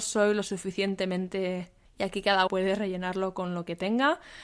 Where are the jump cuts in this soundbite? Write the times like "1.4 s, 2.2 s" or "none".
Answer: 1.8 s, 2.5 s